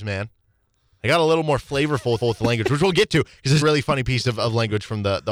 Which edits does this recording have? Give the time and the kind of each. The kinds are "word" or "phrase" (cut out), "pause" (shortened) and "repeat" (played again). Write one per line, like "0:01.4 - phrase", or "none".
0:02.2 - repeat
0:03.6 - word